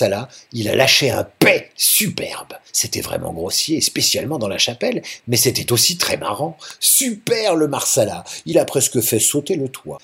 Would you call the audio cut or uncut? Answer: uncut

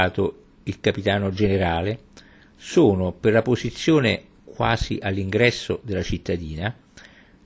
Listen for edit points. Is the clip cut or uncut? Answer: uncut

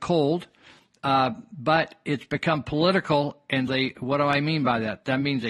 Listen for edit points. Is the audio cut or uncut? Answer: cut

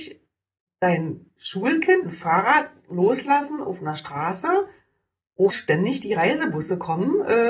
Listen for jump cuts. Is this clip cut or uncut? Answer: cut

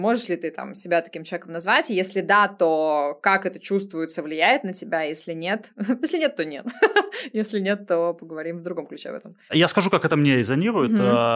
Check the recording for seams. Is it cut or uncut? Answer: uncut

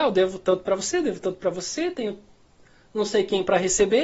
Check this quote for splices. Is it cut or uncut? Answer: uncut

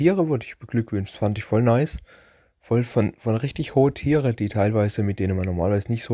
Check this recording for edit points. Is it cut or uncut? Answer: uncut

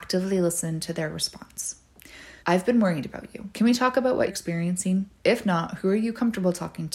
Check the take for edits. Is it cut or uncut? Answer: cut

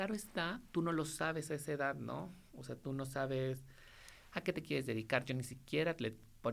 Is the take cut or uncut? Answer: uncut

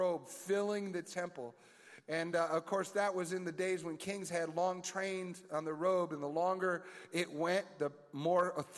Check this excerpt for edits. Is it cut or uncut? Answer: uncut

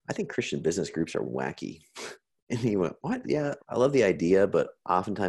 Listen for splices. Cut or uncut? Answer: cut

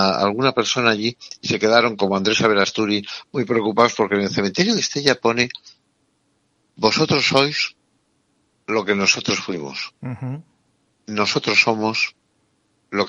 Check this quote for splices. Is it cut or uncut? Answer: uncut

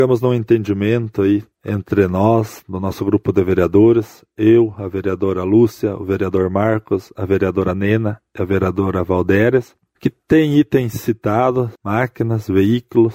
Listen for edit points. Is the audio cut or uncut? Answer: cut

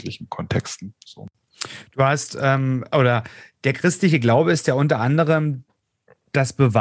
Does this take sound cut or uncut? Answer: uncut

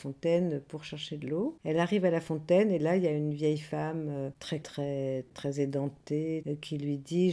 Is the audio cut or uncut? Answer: cut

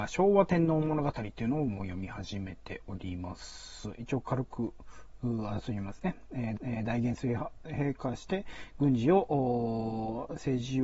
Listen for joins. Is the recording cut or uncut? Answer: cut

